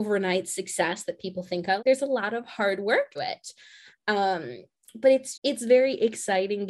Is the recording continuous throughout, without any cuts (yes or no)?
no